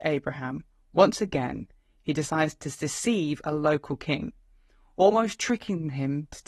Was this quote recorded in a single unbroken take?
yes; 0 cuts

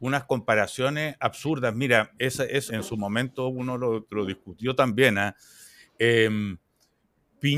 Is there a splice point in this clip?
yes; 2 cuts; at 2.2 s, 2.7 s

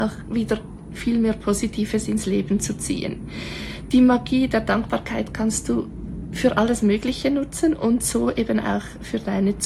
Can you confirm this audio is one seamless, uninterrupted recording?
yes; 0 cuts

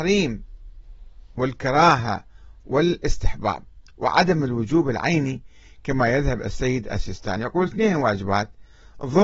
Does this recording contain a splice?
no; 0 cuts

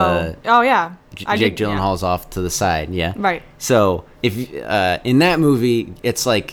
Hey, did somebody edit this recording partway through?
yes; 1 cut; at 4.1 s

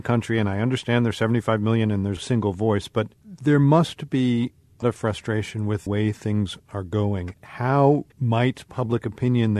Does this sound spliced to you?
yes; 5 cuts; at 2.2 s, 3.1 s, 4.8 s, 5.9 s, 8.1 s

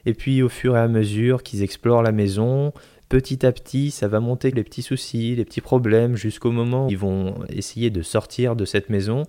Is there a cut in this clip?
yes; 2 cuts; at 4.5 s, 6.9 s

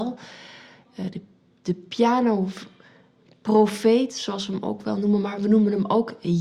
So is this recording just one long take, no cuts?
yes; 0 cuts

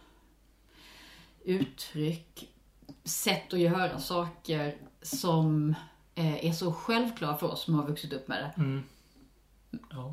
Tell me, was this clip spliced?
no; 0 cuts

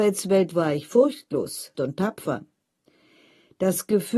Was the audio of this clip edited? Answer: yes; 1 cut; at 1.7 s

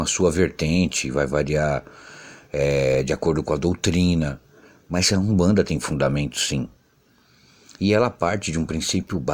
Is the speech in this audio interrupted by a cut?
no; 0 cuts

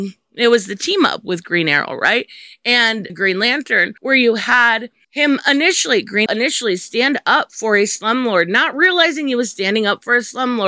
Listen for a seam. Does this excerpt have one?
yes; 4 cuts; at 3.1 s, 4.0 s, 5.0 s, 6.3 s

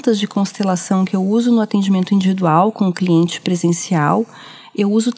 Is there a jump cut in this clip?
no; 0 cuts

